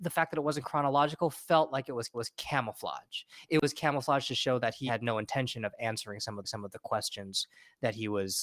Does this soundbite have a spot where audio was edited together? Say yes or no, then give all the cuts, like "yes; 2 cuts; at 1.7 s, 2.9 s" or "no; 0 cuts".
yes; 3 cuts; at 2.1 s, 4.9 s, 6.4 s